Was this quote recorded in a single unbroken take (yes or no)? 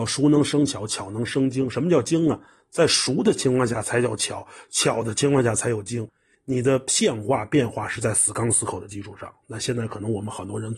yes